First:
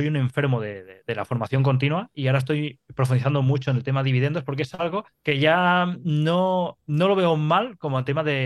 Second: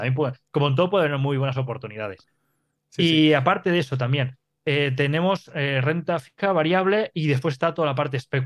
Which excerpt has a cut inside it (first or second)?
first